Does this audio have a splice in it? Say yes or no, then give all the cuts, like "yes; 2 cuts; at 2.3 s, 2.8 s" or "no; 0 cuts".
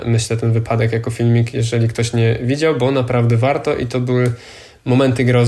no; 0 cuts